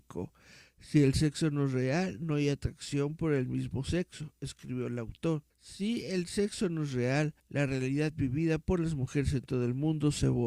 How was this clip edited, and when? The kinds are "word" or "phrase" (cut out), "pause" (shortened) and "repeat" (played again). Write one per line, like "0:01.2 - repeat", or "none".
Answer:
0:05.5 - pause
0:07.4 - pause